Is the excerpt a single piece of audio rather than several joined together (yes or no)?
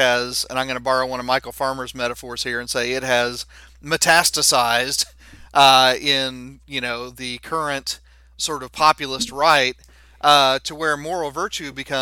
yes